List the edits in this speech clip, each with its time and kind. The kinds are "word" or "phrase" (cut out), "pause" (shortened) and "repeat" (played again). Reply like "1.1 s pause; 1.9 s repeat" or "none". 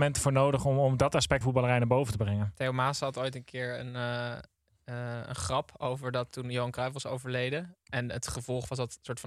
1.4 s word